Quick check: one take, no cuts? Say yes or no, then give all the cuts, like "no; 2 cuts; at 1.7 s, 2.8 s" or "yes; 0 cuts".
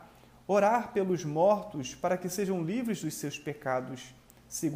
yes; 0 cuts